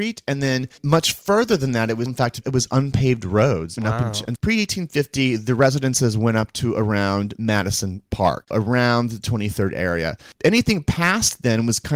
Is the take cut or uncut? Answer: cut